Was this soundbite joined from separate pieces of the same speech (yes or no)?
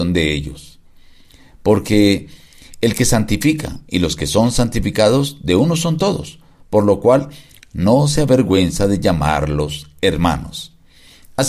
no